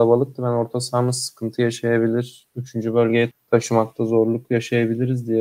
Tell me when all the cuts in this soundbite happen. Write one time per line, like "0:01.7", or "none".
0:03.3

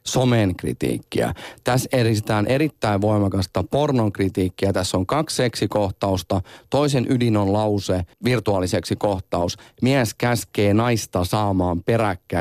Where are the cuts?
0:08.1

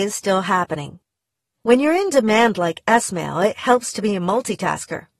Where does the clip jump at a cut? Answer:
none

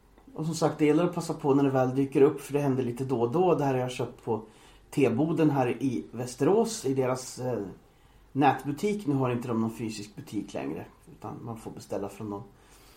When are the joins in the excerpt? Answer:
none

